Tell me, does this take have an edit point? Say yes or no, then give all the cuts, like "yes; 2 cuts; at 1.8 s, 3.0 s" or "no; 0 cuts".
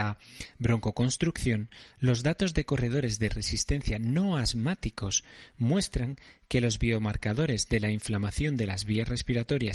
no; 0 cuts